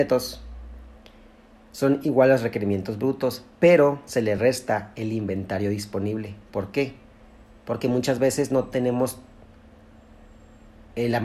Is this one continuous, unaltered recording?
yes; 0 cuts

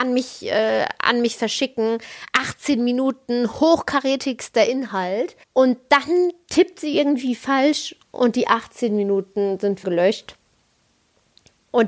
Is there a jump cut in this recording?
yes; 3 cuts; at 5.4 s, 8.0 s, 9.8 s

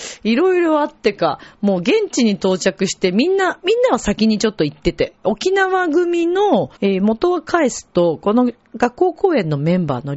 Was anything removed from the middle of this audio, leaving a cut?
yes; 1 cut; at 6.8 s

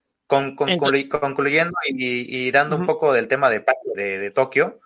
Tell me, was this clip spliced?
yes; 1 cut; at 3.9 s

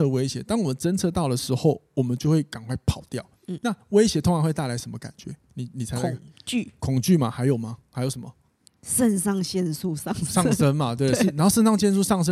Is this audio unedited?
no; 1 cut; at 3.3 s

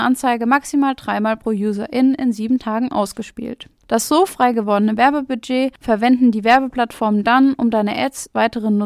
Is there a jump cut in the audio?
no; 0 cuts

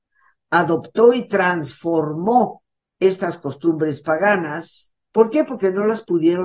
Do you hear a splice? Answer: yes; 2 cuts; at 2.8 s, 5.0 s

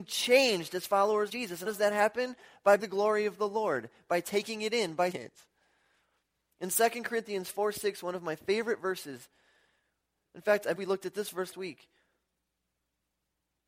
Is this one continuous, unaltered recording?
no; 6 cuts; at 1.3 s, 1.7 s, 2.8 s, 5.1 s, 10.8 s, 11.5 s

